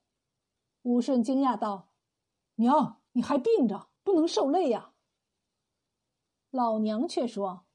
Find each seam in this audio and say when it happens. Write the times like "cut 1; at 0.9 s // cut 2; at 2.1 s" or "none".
cut 1; at 2.0 s // cut 2; at 3.1 s // cut 3; at 4.0 s